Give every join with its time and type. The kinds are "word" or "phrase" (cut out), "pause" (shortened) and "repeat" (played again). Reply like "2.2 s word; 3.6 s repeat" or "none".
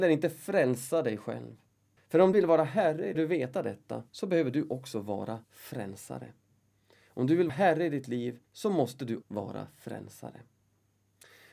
2.0 s pause; 2.3 s word; 3.1 s phrase; 4.1 s pause; 5.4 s pause; 7.5 s word; 8.4 s pause; 9.2 s word

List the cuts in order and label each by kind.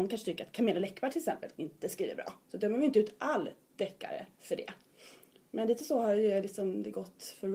none

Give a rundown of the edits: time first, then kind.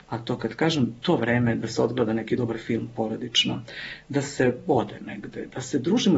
none

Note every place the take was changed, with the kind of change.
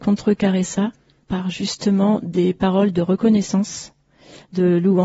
none

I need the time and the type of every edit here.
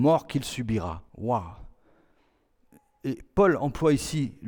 1.1 s pause

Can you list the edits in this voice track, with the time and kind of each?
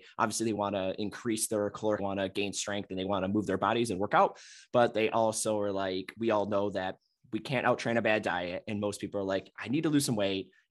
2.0 s phrase

